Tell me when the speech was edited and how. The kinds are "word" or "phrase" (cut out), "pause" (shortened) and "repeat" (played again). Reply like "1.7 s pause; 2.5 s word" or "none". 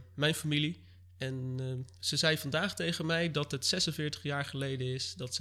none